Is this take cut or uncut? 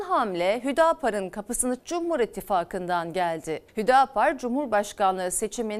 cut